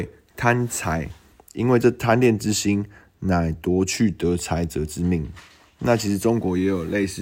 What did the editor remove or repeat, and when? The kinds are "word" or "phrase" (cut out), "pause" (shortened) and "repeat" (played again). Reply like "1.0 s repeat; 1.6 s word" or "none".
none